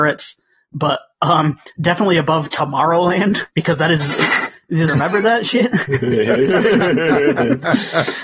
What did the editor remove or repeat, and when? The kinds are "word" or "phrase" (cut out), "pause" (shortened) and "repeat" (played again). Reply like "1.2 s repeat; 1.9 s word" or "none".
3.5 s pause; 4.9 s word